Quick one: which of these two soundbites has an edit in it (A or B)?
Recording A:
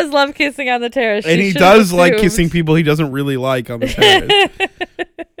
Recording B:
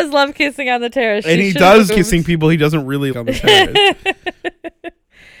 B